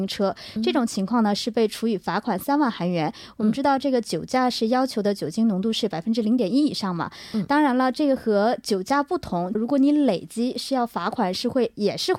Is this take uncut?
no; 1 cut; at 9.5 s

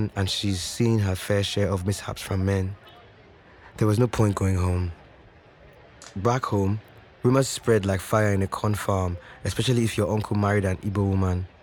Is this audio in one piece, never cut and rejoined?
yes; 0 cuts

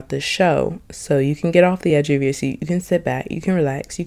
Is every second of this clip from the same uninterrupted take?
yes; 0 cuts

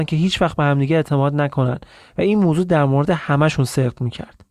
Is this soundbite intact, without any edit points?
yes; 0 cuts

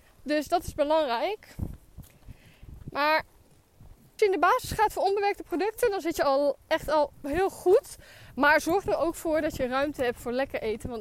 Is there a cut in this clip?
yes; 1 cut; at 4.2 s

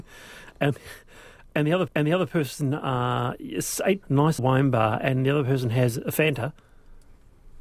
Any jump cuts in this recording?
yes; 3 cuts; at 1.9 s, 4.0 s, 4.4 s

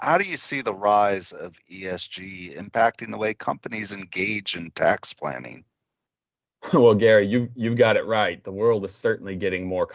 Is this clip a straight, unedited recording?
yes; 0 cuts

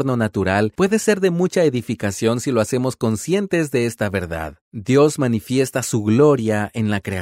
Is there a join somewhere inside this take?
yes; 1 cut; at 4.6 s

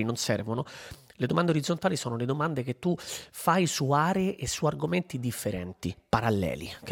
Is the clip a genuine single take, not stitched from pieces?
yes; 0 cuts

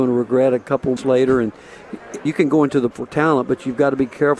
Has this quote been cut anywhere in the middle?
yes; 3 cuts; at 1.0 s, 2.3 s, 2.9 s

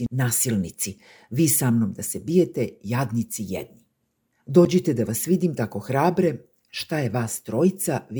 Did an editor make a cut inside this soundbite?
no; 0 cuts

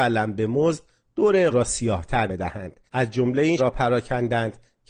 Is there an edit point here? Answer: yes; 4 cuts; at 1.5 s, 2.3 s, 2.9 s, 3.6 s

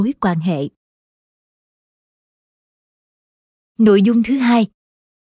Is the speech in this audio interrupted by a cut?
no; 0 cuts

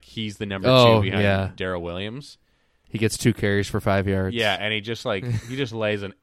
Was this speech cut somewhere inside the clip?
no; 0 cuts

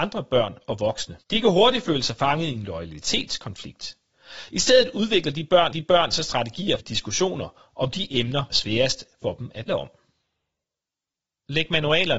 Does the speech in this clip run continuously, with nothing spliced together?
no; 5 cuts; at 1.2 s, 5.7 s, 6.8 s, 8.5 s, 9.7 s

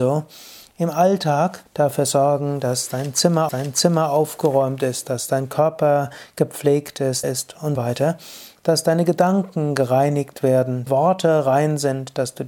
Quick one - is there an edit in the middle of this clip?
yes; 5 cuts; at 1.7 s, 3.5 s, 7.2 s, 7.8 s, 10.9 s

